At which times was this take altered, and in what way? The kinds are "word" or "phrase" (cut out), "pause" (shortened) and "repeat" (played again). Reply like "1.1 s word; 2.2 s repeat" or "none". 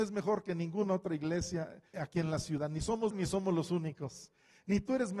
1.9 s word; 3.1 s word